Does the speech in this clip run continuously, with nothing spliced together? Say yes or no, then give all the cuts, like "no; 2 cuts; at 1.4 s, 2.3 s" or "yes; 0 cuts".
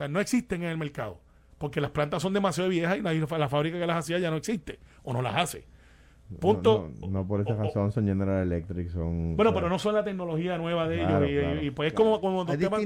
yes; 0 cuts